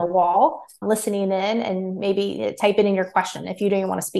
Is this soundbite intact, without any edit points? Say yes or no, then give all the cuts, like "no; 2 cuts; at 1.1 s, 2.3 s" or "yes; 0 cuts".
yes; 0 cuts